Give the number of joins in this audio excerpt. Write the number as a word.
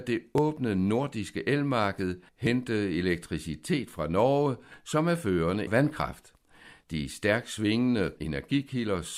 three